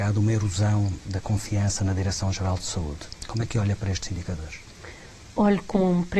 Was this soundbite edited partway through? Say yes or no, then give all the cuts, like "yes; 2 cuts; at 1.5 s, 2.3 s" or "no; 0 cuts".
no; 0 cuts